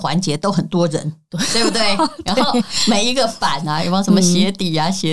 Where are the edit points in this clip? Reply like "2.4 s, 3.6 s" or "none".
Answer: none